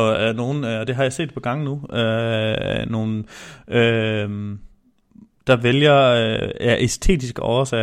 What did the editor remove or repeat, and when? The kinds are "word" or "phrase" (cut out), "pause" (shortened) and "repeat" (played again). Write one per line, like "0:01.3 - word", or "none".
none